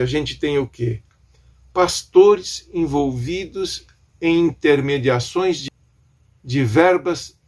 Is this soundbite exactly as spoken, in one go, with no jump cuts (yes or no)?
yes